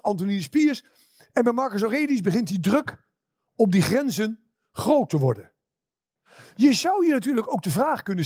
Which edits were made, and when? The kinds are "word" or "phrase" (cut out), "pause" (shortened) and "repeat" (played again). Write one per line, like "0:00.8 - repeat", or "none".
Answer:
none